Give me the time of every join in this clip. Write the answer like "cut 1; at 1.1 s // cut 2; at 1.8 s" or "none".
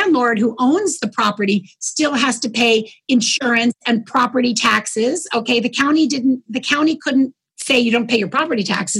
none